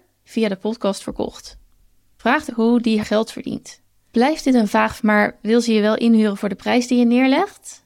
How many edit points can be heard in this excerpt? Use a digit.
3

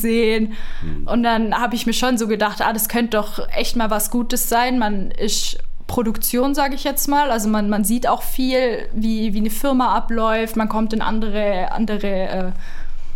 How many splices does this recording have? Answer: 0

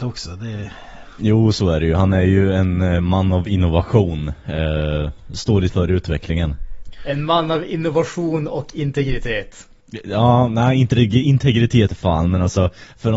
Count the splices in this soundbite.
2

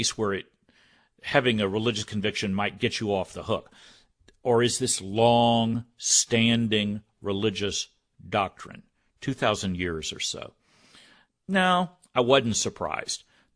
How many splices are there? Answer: 0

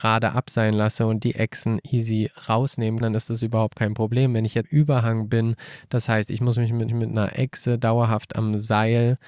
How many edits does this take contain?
3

